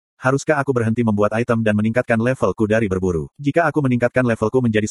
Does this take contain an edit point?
yes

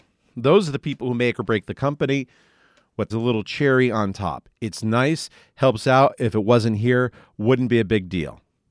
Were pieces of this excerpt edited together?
yes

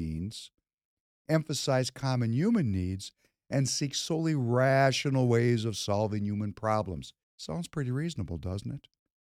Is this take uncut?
no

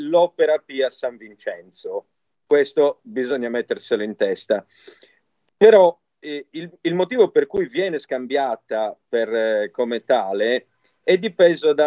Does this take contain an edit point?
no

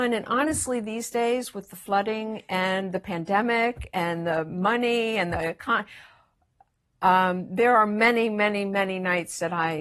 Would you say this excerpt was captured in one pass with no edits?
yes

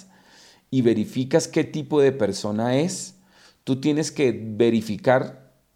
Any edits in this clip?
no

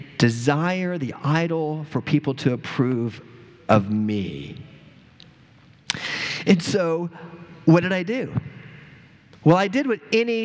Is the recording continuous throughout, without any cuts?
yes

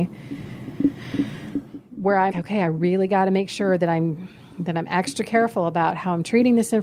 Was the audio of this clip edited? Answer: yes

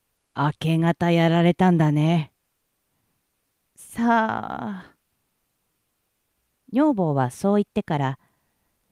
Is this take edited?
no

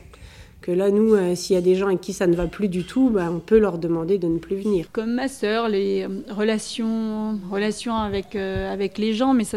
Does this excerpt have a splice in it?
no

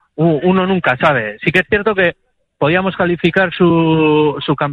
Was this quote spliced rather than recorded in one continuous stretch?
no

